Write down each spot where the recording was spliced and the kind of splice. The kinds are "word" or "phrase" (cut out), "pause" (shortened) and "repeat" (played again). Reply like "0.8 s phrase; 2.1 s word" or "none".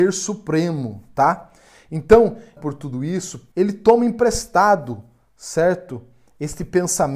2.6 s word; 3.5 s phrase